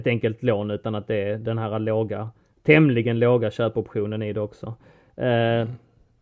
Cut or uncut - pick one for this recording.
uncut